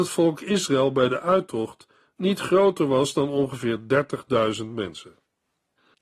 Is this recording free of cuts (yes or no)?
yes